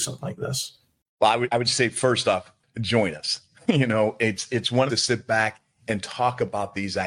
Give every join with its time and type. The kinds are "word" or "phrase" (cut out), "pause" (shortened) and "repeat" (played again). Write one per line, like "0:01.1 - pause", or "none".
0:04.9 - phrase